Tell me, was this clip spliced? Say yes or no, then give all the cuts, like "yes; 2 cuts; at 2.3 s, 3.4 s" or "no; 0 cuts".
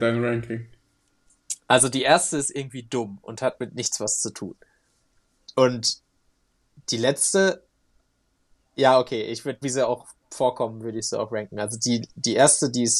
yes; 1 cut; at 9.6 s